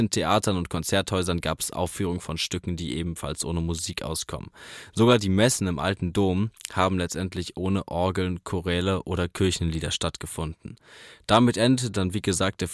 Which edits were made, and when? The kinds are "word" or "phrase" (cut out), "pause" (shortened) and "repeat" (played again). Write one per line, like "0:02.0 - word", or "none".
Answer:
none